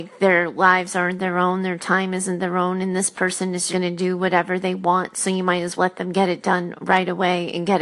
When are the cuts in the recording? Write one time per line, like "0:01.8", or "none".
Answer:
0:03.7
0:05.8